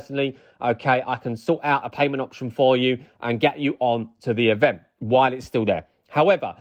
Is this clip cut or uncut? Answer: cut